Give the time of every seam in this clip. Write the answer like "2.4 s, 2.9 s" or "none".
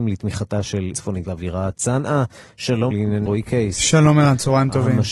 0.9 s, 1.2 s, 2.9 s, 3.3 s